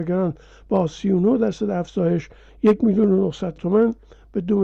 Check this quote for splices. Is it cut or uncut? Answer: cut